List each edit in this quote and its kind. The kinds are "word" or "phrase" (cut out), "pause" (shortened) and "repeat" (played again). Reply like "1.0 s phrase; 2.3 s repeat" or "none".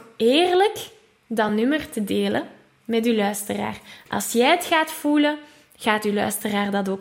none

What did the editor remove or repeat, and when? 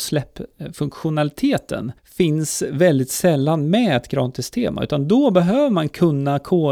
2.0 s pause

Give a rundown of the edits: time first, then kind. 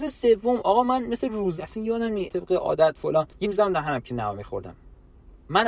1.6 s word; 2.3 s word; 3.4 s word

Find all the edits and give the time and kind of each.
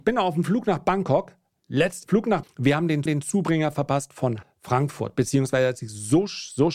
2.0 s word; 2.4 s word; 3.1 s repeat; 4.4 s phrase

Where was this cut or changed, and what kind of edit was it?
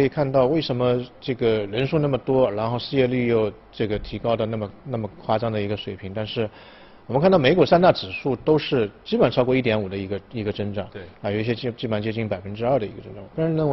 none

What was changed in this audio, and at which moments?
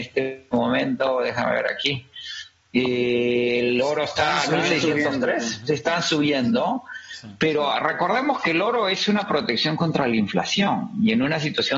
none

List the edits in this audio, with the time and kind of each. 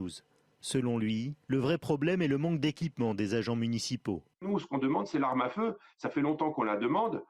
1.4 s pause; 4.3 s pause

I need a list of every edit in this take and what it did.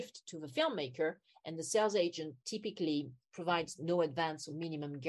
none

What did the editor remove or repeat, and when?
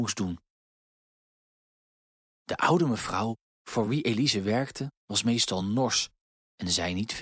none

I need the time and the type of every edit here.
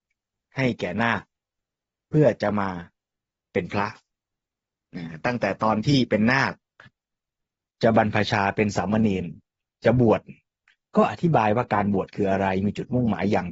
none

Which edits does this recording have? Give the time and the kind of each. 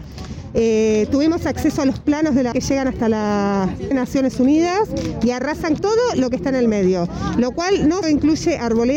2.5 s word; 3.9 s word; 5.8 s word; 8.0 s word

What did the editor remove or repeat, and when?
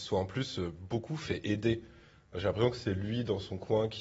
none

